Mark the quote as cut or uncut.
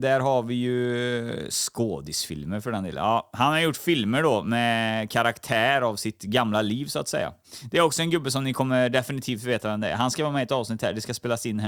uncut